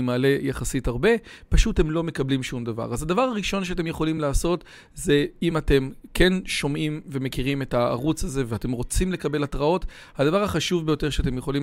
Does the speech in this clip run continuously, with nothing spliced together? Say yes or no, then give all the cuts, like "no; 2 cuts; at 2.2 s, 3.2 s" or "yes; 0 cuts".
yes; 0 cuts